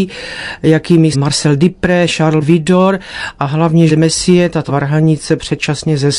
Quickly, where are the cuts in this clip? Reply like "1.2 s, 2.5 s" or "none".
1.1 s, 2.4 s, 3.9 s, 4.7 s

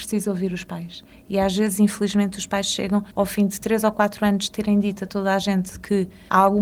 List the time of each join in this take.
3.1 s

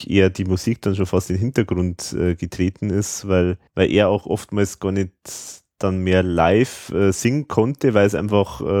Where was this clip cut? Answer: 3.7 s

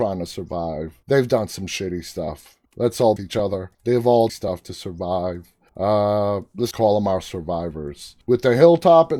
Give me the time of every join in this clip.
1.0 s, 2.7 s, 3.2 s, 3.7 s, 4.3 s, 5.7 s, 6.7 s, 8.2 s

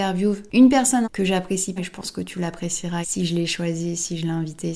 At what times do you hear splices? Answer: 1.0 s, 1.8 s, 3.0 s

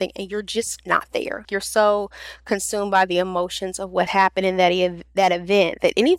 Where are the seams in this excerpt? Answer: 1.4 s, 4.1 s

